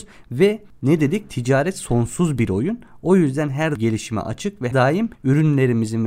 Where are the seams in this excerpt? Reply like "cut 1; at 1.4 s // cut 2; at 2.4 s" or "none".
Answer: cut 1; at 3.8 s // cut 2; at 4.7 s